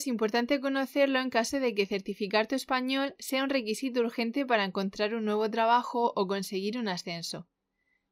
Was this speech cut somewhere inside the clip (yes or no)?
no